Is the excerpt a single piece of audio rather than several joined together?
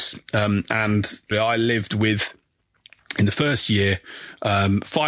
no; 1 cut; at 1.3 s

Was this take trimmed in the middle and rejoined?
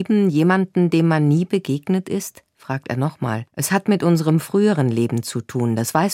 yes; 1 cut; at 3.5 s

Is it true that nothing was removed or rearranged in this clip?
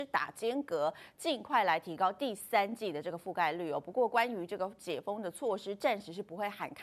yes; 0 cuts

